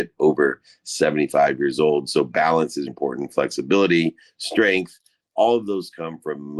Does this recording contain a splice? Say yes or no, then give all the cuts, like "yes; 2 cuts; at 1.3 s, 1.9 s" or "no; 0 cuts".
yes; 1 cut; at 2.9 s